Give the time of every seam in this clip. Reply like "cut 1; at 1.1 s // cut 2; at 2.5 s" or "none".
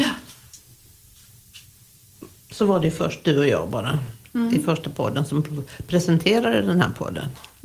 none